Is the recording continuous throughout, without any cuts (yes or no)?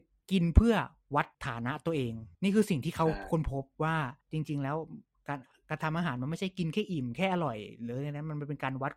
no